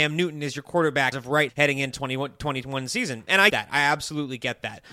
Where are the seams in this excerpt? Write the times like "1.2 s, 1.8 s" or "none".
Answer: 1.1 s, 1.5 s, 1.9 s, 3.5 s